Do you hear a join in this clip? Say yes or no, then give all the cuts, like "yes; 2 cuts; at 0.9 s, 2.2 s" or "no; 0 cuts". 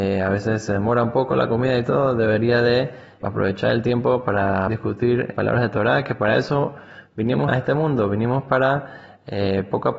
yes; 4 cuts; at 3.2 s, 4.7 s, 5.3 s, 7.5 s